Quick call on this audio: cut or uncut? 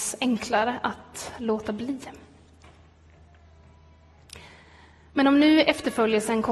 uncut